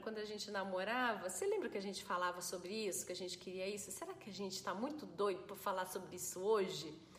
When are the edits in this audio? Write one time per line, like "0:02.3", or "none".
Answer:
none